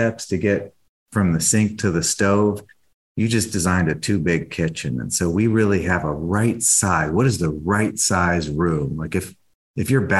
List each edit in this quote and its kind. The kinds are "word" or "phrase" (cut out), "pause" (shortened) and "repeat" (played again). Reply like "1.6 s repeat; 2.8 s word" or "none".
none